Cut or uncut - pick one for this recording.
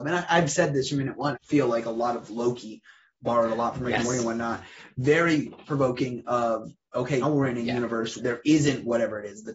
cut